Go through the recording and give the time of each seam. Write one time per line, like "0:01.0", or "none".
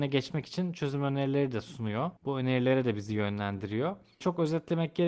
0:02.2

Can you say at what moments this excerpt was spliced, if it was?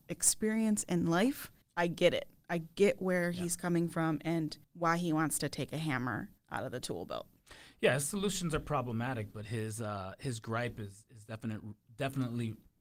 0:01.6
0:04.6
0:06.4

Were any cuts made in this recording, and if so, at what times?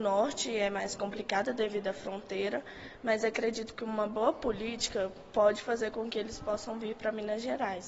none

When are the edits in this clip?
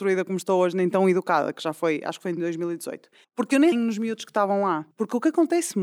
0:03.2
0:03.7
0:04.9

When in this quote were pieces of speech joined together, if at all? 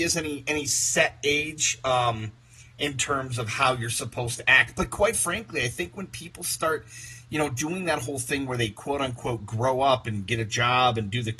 none

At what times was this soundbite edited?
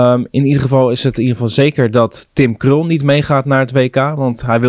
none

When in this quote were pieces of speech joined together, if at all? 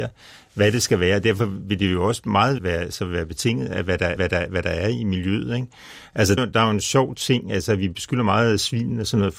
0:02.6
0:04.2
0:06.4

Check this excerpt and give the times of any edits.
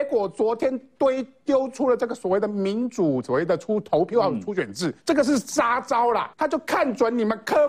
0:05.0
0:06.3

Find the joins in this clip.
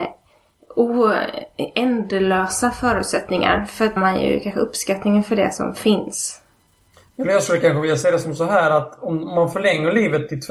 0:04.0

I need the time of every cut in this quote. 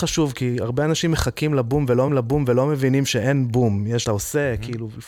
0:02.1
0:04.0

